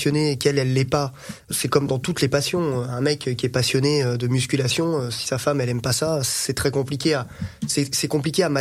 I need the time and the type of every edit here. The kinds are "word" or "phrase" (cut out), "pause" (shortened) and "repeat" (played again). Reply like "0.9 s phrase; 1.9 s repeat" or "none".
1.5 s word